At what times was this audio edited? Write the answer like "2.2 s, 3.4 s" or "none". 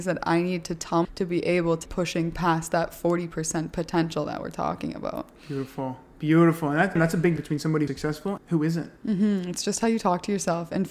1.0 s, 1.9 s, 7.0 s, 7.4 s, 7.9 s, 8.4 s